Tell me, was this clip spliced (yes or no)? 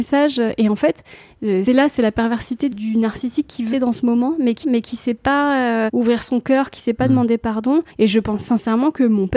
yes